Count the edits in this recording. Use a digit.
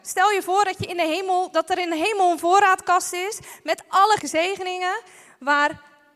1